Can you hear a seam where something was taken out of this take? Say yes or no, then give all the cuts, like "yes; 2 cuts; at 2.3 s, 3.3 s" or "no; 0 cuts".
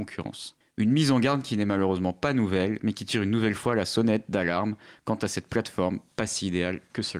no; 0 cuts